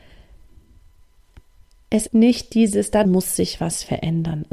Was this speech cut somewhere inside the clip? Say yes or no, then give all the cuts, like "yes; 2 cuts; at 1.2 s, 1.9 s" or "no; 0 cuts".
yes; 2 cuts; at 2.1 s, 3.0 s